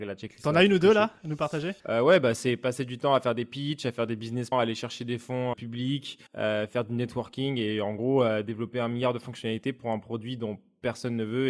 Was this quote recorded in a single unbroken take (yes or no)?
no